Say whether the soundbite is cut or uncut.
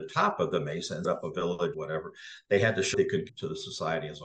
cut